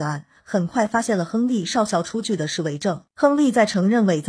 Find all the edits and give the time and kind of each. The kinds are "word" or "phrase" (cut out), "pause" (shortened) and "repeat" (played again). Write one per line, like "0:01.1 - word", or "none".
0:03.1 - pause

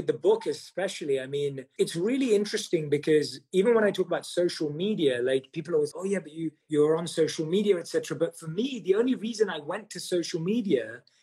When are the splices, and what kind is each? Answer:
0:01.8 - word
0:05.9 - word
0:06.6 - pause

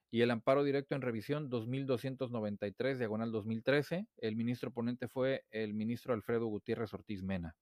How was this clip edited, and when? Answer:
0:04.1 - pause

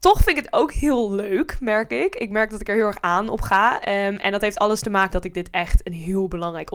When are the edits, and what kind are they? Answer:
0:05.1 - word

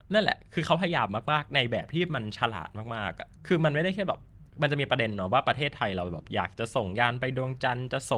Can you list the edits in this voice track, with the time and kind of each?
0:03.4 - pause
0:04.5 - pause

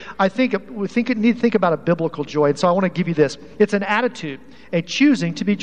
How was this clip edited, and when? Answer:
none

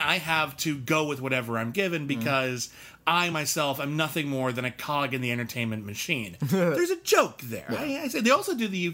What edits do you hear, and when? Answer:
none

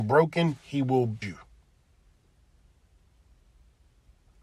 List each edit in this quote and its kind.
0:01.2 - word

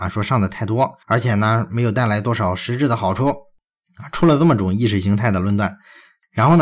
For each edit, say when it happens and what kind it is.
0:01.0 - pause

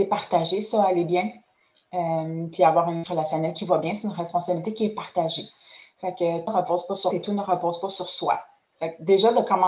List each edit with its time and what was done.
0:03.0 - word
0:06.5 - word
0:07.1 - word

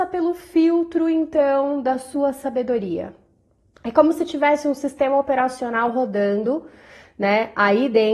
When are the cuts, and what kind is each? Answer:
none

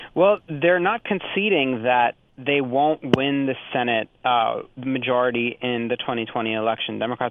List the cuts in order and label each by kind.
none

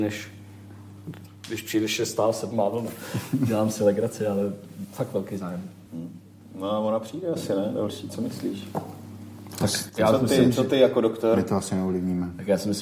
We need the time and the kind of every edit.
0:05.9 - pause

